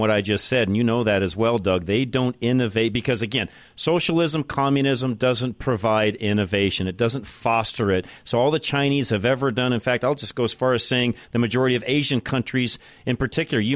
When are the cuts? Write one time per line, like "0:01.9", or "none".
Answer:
none